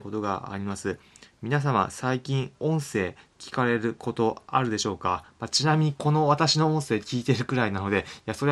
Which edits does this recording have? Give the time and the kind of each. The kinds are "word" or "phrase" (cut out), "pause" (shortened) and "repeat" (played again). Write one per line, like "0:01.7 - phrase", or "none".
0:02.5 - pause